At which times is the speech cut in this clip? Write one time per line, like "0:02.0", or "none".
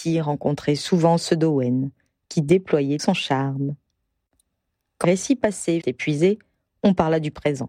0:03.0
0:05.0
0:05.8

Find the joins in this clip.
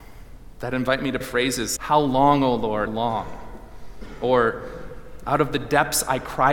0:01.2
0:01.8
0:02.9

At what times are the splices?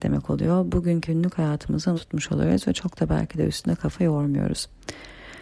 0:01.1
0:02.0

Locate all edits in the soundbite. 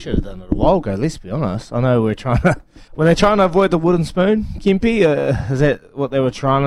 0:02.9

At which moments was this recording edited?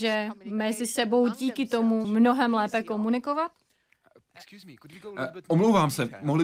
0:02.0

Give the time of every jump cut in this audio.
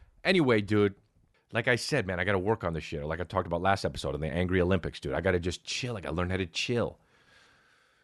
none

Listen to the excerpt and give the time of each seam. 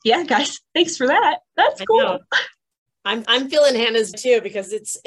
0:03.2
0:04.1

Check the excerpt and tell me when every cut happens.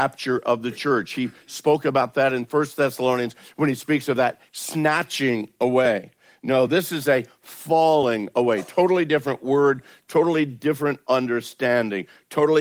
none

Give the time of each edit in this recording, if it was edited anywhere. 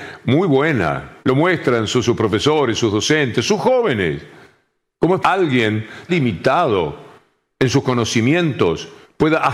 0:01.2
0:02.0
0:05.2
0:06.1

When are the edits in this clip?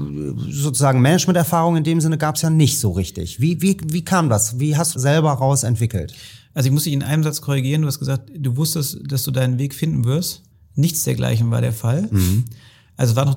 0:04.9
0:10.5

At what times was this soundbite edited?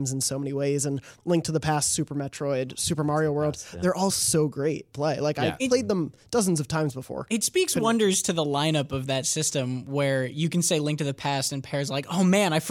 0:04.1
0:04.9

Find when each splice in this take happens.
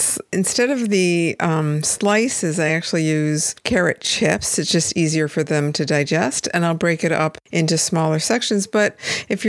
none

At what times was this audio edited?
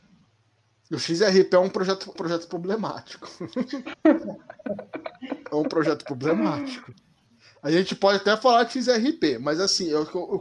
0:02.2

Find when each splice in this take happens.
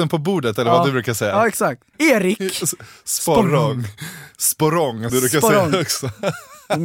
0:05.1

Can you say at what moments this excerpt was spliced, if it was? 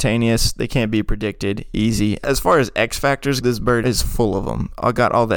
0:02.2
0:03.4
0:03.8

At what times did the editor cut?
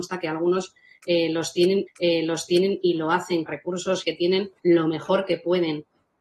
0:01.9
0:03.5
0:04.0
0:04.6

